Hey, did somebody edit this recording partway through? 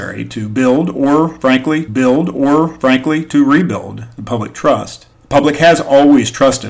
yes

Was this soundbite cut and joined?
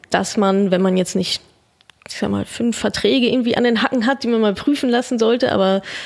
no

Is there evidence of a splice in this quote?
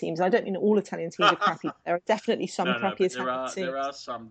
no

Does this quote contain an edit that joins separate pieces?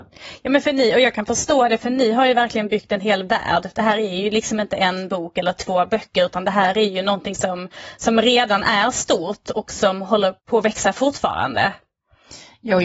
yes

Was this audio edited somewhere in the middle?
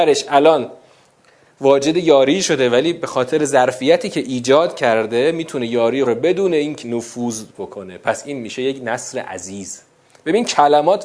yes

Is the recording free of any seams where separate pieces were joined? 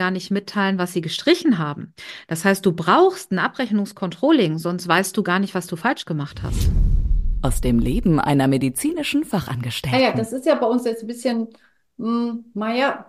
yes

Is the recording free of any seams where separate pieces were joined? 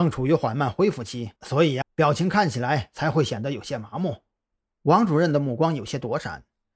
no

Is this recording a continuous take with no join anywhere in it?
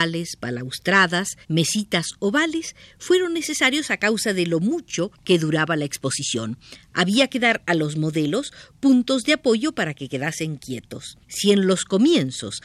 no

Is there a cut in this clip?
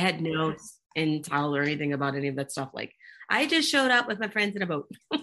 no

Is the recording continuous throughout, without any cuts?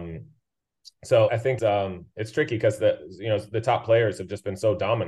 no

